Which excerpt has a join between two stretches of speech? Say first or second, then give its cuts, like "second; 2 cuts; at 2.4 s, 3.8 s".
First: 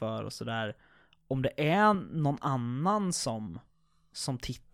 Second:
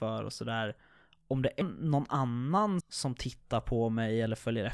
second; 2 cuts; at 1.6 s, 2.8 s